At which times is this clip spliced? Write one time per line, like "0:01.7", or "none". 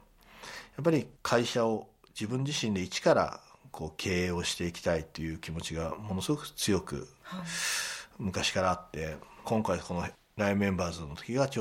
0:01.1
0:09.4